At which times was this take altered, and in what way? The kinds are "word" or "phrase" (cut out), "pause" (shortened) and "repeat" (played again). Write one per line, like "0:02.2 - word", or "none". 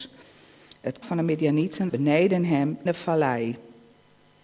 0:01.0 - word
0:01.9 - word
0:02.9 - word